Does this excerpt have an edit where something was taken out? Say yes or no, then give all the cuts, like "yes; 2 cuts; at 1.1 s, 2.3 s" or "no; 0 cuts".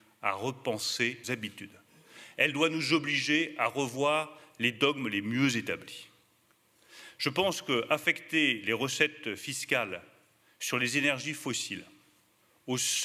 yes; 1 cut; at 1.2 s